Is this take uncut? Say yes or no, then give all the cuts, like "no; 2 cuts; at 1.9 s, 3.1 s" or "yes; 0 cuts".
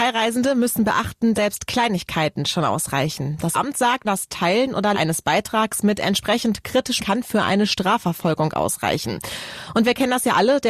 no; 5 cuts; at 1.3 s, 3.5 s, 4.0 s, 4.9 s, 7.0 s